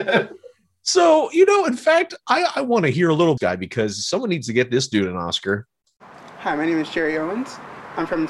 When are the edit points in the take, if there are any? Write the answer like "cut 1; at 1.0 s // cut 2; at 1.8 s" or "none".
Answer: cut 1; at 3.4 s